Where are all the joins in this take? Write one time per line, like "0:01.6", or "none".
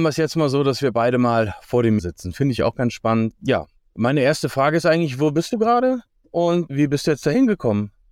0:02.0